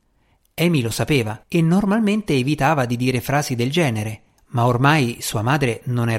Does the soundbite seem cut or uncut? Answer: cut